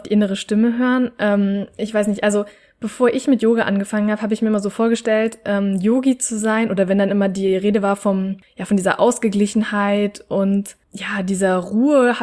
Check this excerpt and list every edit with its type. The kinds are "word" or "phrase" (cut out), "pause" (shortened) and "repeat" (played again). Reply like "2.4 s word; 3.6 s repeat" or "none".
none